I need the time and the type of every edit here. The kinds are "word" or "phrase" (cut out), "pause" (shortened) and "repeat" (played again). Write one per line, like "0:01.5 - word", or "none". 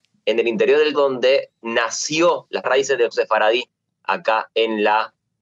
0:00.9 - word
0:02.6 - word
0:03.1 - word